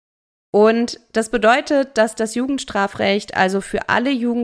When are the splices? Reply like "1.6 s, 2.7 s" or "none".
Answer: none